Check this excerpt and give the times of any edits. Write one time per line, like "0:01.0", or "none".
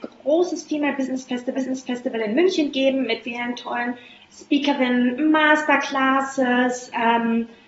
0:01.5
0:03.2